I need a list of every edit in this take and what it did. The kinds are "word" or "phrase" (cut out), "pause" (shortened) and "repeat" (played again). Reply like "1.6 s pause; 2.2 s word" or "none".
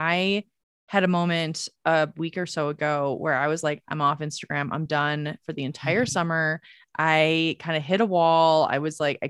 none

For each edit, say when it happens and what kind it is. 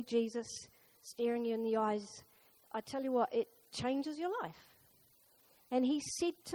none

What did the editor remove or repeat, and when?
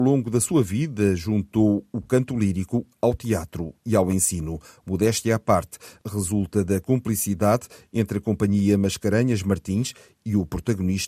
none

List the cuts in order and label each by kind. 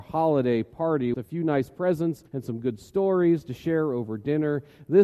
1.1 s word; 2.3 s pause

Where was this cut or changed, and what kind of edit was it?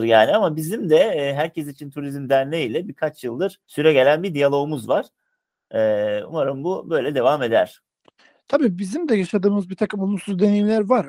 3.6 s pause

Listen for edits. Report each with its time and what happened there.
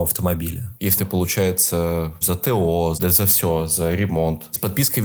1.0 s word; 2.2 s word; 2.9 s word

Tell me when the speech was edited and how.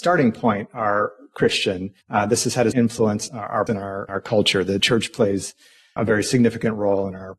2.0 s pause; 2.7 s word; 3.3 s phrase; 3.7 s word; 4.1 s word; 4.8 s word; 6.0 s word

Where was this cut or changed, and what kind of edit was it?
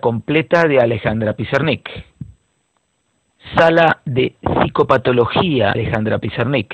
5.7 s word

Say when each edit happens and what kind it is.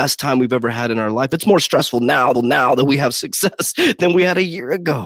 2.3 s repeat

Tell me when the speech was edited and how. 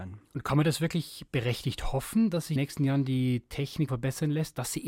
2.6 s phrase; 3.9 s word

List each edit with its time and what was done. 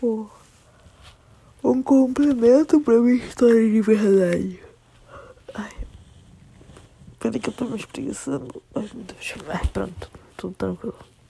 none

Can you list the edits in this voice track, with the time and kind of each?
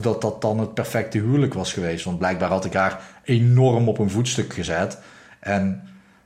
none

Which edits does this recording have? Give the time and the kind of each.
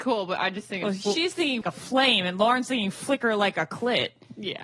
1.6 s phrase

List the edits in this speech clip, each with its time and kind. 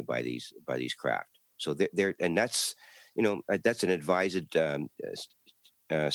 none

